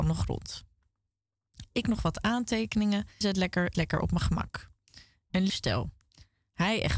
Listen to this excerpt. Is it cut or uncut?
cut